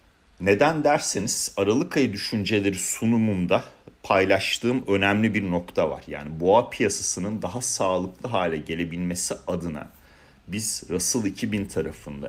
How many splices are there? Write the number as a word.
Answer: zero